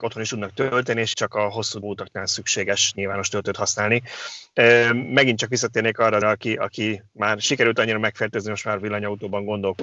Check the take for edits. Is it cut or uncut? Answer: cut